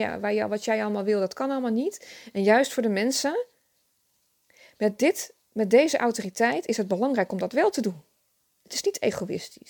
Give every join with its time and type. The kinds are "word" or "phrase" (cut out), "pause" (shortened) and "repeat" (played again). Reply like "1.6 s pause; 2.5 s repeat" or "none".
none